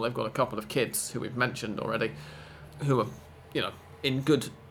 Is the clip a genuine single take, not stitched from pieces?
no; 1 cut; at 2.7 s

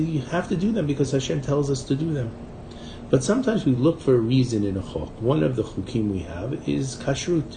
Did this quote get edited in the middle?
no; 0 cuts

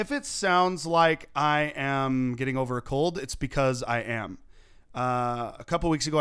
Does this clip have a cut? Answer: no; 0 cuts

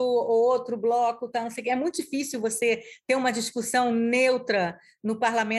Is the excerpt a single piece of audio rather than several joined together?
yes; 0 cuts

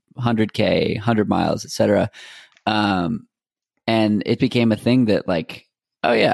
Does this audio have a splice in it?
yes; 1 cut; at 4.4 s

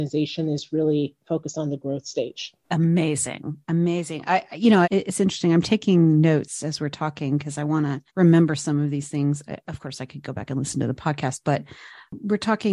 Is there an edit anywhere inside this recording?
yes; 3 cuts; at 2.6 s, 4.8 s, 8.1 s

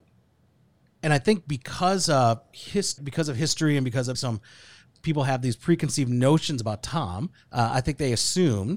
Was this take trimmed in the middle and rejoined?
yes; 3 cuts; at 3.0 s, 4.1 s, 7.4 s

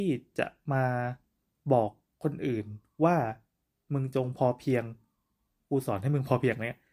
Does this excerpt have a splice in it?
no; 0 cuts

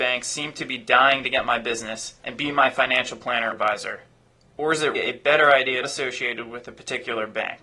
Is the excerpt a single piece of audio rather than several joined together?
no; 4 cuts; at 2.2 s, 3.5 s, 4.9 s, 5.8 s

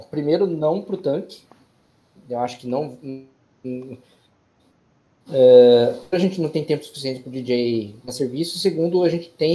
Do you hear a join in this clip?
no; 0 cuts

